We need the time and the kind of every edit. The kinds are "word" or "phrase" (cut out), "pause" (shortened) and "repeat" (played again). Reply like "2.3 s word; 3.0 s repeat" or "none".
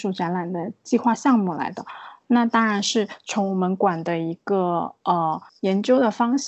5.5 s pause